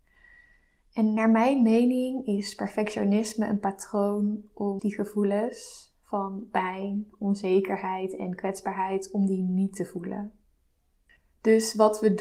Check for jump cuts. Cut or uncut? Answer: cut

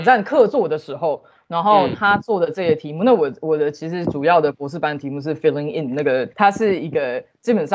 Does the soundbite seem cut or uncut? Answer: uncut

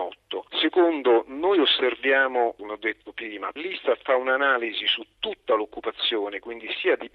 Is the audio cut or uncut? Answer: cut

